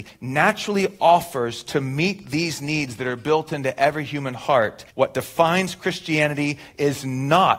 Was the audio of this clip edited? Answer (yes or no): yes